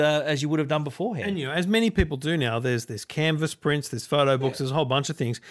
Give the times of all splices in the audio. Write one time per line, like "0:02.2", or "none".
none

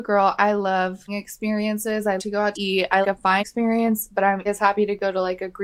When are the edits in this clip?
0:01.1
0:02.2
0:02.5
0:03.0
0:03.4
0:04.5

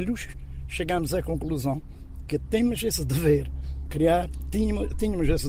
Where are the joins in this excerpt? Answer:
0:03.9

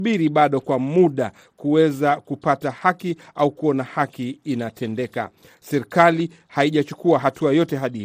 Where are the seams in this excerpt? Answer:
none

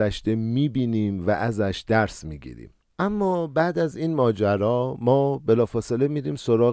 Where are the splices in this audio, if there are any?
none

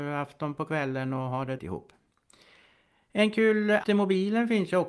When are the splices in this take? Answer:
0:01.6
0:03.8

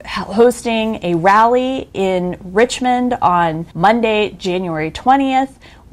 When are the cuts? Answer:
0:03.7

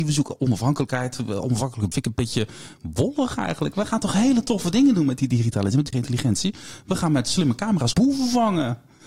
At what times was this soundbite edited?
0:01.9
0:05.9
0:07.9

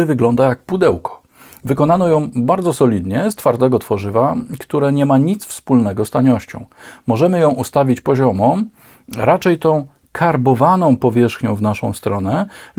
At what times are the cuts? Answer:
none

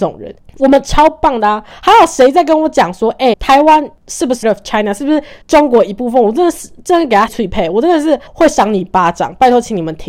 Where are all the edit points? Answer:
0:03.3
0:04.4
0:05.4
0:07.3
0:08.3

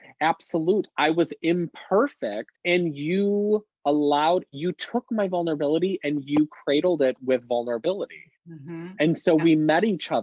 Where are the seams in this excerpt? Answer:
0:02.6
0:08.4

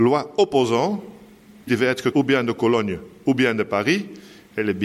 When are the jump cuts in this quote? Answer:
0:01.7
0:02.1

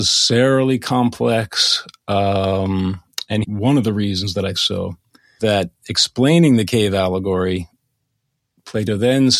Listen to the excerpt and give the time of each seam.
0:03.4
0:04.5
0:05.4

